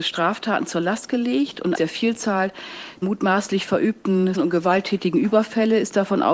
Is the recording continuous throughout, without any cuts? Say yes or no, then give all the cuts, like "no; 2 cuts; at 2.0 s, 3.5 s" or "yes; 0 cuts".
no; 3 cuts; at 1.7 s, 3.0 s, 4.3 s